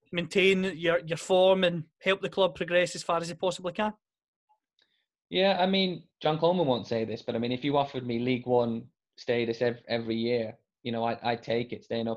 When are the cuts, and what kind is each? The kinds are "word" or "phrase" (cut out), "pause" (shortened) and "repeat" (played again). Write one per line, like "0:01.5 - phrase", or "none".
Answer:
0:06.1 - pause